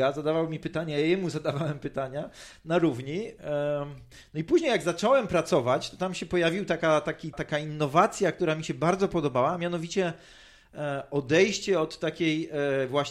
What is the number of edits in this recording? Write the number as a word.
one